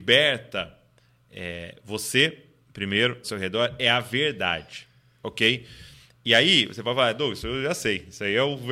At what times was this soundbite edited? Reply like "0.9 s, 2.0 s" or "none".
3.2 s

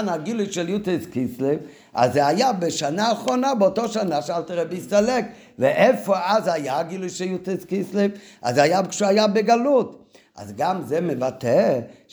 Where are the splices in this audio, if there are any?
none

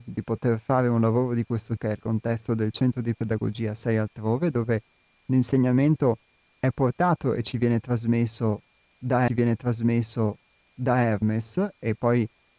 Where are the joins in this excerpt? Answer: 1.8 s, 9.3 s

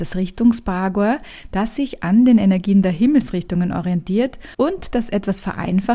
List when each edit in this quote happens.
4.5 s

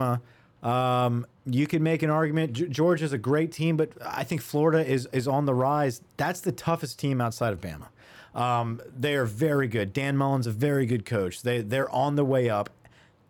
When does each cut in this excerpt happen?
1.3 s

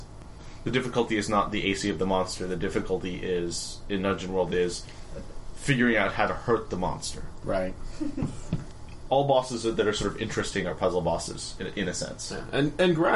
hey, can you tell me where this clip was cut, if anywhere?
none

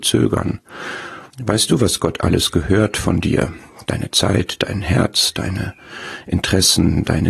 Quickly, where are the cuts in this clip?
1.3 s

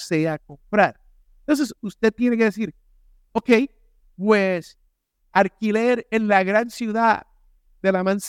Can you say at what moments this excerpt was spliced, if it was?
none

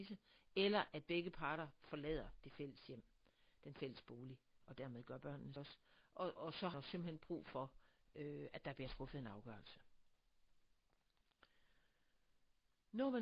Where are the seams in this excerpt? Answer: 5.6 s, 6.4 s, 6.7 s

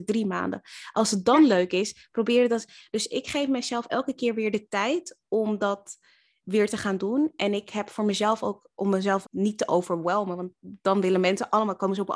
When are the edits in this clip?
9.2 s

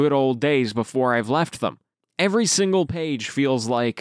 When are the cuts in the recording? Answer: none

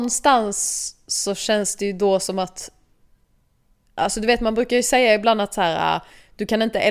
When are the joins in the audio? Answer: none

